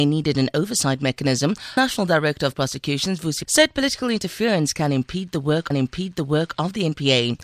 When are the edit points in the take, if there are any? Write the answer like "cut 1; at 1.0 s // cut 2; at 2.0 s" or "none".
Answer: cut 1; at 1.8 s // cut 2; at 2.5 s // cut 3; at 3.4 s // cut 4; at 5.7 s

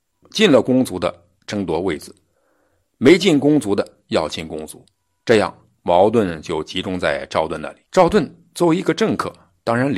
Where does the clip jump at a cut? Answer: cut 1; at 7.8 s

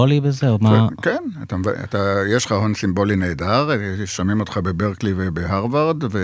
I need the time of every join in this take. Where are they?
none

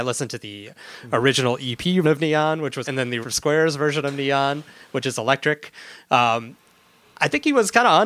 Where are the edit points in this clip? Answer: cut 1; at 2.0 s // cut 2; at 2.8 s // cut 3; at 3.2 s

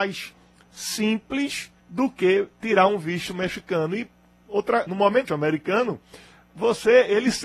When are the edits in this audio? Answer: cut 1; at 1.8 s // cut 2; at 4.9 s // cut 3; at 5.3 s

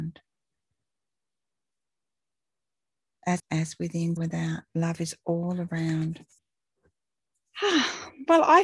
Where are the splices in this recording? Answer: cut 1; at 3.4 s // cut 2; at 4.2 s // cut 3; at 4.7 s // cut 4; at 6.4 s

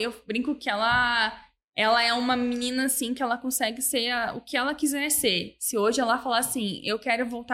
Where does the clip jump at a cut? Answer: none

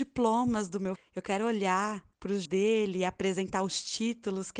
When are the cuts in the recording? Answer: cut 1; at 1.0 s // cut 2; at 2.1 s // cut 3; at 2.5 s

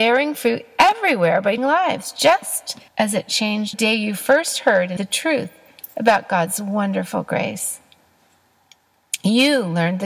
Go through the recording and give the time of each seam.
cut 1; at 1.6 s // cut 2; at 2.9 s // cut 3; at 3.7 s // cut 4; at 5.0 s

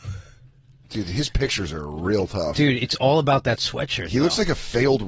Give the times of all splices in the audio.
none

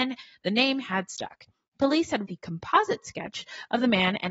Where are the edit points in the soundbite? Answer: cut 1; at 2.2 s

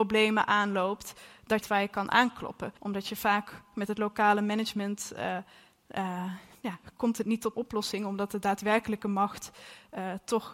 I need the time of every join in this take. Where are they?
cut 1; at 1.6 s // cut 2; at 2.8 s // cut 3; at 7.5 s

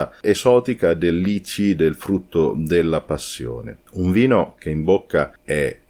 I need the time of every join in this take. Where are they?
cut 1; at 3.8 s

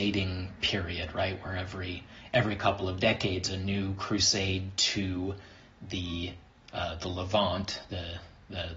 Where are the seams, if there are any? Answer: none

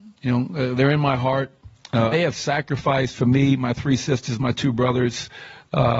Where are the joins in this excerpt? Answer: cut 1; at 2.1 s

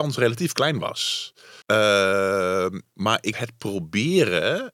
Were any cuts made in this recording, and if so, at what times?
cut 1; at 1.6 s // cut 2; at 3.3 s

